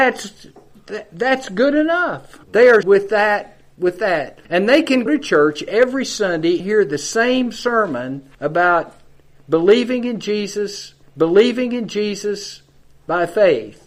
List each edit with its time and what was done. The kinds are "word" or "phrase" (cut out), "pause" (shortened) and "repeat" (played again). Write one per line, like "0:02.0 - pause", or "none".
0:02.4 - pause
0:02.8 - word
0:04.4 - pause
0:05.1 - word
0:06.6 - word
0:08.3 - pause
0:11.0 - repeat